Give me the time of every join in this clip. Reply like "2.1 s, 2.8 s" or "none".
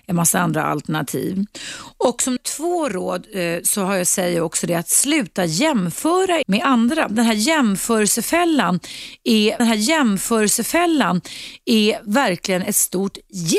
2.4 s, 6.4 s, 9.6 s